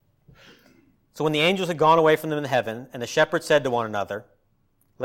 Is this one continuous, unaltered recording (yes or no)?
yes